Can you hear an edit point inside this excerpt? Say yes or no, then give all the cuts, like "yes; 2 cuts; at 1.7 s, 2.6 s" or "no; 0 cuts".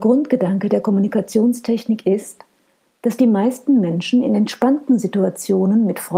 no; 0 cuts